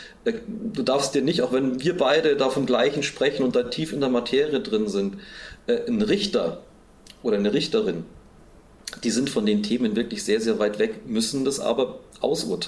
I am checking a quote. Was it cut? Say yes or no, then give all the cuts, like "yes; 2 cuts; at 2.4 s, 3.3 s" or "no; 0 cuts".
no; 0 cuts